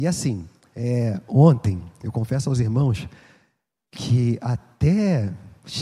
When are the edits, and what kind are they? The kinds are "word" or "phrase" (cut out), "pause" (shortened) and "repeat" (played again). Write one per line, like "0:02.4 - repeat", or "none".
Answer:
none